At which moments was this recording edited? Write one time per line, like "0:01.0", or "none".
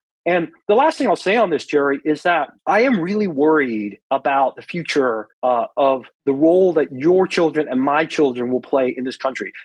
0:02.6
0:04.0
0:05.3
0:06.1